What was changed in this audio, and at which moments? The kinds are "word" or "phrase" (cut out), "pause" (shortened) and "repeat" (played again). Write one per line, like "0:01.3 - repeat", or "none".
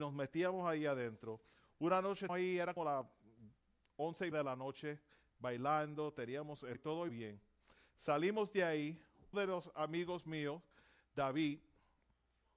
0:02.3 - word
0:02.8 - word
0:04.3 - word
0:06.7 - word
0:07.1 - word
0:09.3 - word

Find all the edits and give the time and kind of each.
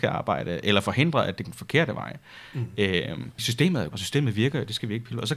0:01.4 - word
0:03.4 - word
0:03.9 - word

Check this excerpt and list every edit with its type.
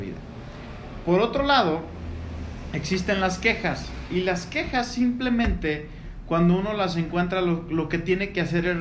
none

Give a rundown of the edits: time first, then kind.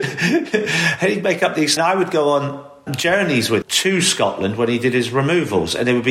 0:01.8 - phrase
0:02.9 - word
0:03.6 - word

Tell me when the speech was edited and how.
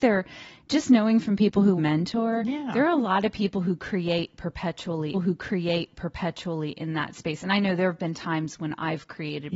0:01.8 - word
0:05.1 - repeat

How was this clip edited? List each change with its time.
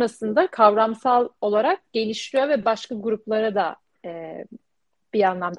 none

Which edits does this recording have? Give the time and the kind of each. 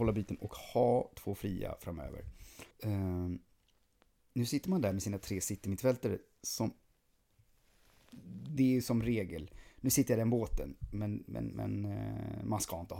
0:02.7 - pause

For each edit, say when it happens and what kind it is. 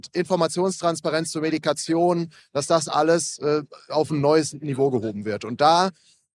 none

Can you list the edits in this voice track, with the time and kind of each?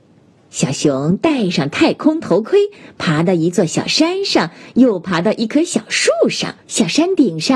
0:06.6 - pause

